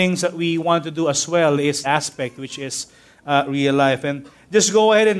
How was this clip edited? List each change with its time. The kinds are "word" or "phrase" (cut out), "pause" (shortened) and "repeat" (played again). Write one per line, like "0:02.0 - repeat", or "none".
0:01.8 - phrase